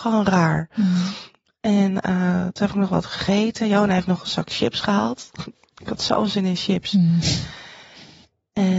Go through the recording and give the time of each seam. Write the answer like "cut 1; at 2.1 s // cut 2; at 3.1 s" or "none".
none